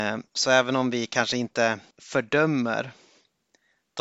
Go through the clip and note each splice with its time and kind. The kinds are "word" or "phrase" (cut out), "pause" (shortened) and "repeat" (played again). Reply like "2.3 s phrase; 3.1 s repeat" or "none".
1.9 s pause